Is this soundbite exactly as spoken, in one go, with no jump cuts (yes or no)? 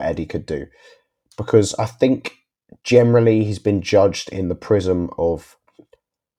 no